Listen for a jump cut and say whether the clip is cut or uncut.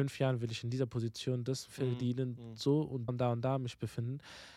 cut